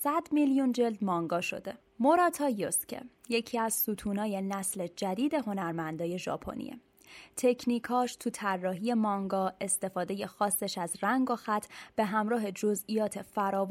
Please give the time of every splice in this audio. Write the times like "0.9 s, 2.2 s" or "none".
1.8 s